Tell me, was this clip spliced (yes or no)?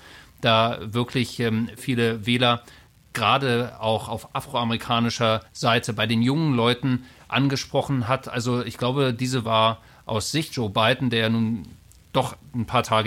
yes